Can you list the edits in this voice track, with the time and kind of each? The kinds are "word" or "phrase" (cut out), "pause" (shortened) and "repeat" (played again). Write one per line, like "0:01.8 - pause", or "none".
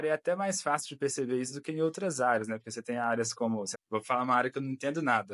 0:03.7 - word